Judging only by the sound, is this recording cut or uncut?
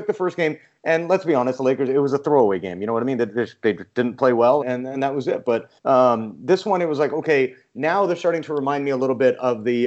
cut